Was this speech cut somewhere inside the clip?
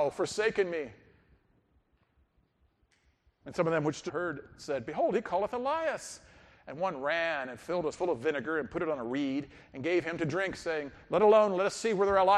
yes; 2 cuts; at 4.1 s, 7.9 s

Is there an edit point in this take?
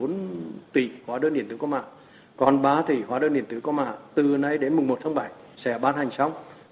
no; 0 cuts

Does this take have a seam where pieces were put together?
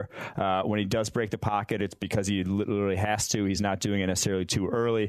no; 0 cuts

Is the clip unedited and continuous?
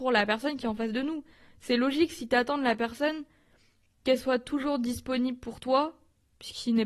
yes; 0 cuts

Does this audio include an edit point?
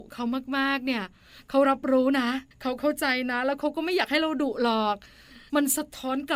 yes; 1 cut; at 2.5 s

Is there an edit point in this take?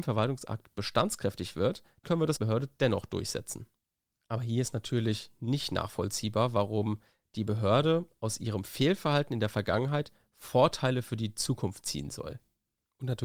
yes; 2 cuts; at 2.0 s, 2.4 s

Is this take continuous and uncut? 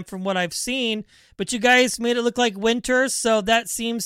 yes; 0 cuts

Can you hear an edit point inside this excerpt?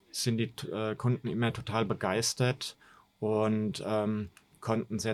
no; 0 cuts

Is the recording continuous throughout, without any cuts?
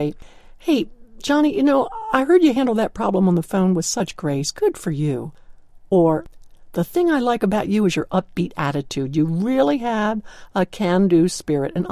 yes; 0 cuts

